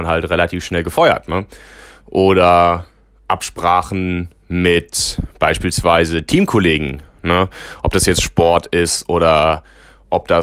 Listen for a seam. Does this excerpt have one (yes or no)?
no